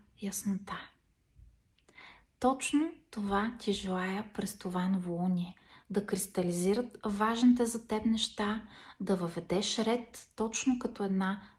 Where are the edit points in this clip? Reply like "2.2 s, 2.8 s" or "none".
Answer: none